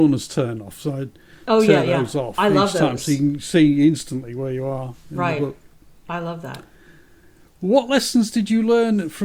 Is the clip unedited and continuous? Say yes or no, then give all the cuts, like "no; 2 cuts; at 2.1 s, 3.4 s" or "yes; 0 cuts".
yes; 0 cuts